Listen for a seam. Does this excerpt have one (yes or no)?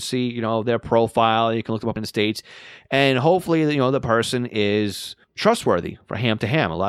yes